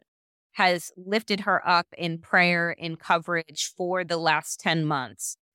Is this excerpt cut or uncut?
uncut